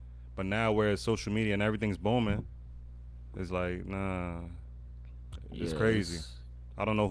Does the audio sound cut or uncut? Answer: cut